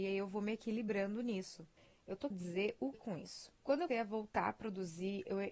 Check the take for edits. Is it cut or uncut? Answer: cut